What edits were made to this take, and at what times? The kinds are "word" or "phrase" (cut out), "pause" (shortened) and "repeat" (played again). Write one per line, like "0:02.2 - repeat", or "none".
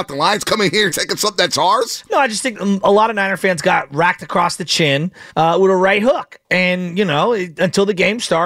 0:00.9 - word
0:02.5 - phrase
0:05.3 - pause